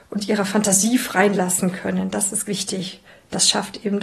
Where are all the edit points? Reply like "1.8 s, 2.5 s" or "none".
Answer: 1.3 s, 2.4 s